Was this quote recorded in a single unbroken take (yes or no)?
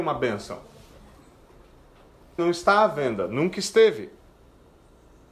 no